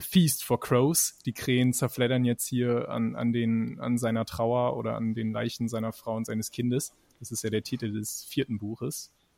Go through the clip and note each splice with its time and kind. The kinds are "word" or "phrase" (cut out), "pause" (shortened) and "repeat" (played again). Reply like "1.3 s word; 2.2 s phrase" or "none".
none